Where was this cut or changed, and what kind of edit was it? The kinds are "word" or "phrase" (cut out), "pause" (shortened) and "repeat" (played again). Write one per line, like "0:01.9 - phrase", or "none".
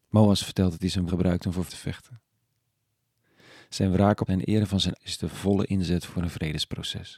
0:01.1 - word
0:01.7 - word
0:04.3 - word
0:05.0 - word